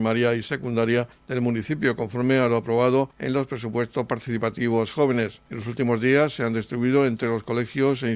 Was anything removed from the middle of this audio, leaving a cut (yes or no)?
no